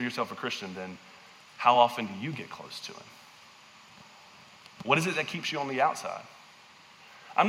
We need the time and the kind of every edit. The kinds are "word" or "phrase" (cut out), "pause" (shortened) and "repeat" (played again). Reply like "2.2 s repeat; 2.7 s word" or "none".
none